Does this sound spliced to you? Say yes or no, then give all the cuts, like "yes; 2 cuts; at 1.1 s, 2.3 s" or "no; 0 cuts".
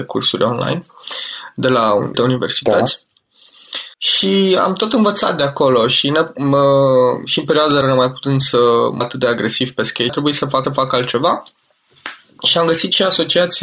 yes; 6 cuts; at 2.1 s, 3.9 s, 7.8 s, 9.0 s, 10.1 s, 10.6 s